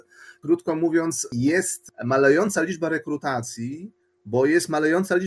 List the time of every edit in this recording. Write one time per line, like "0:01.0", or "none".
none